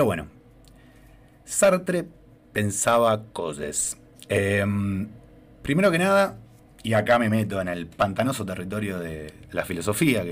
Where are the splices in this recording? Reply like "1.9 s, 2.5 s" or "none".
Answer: none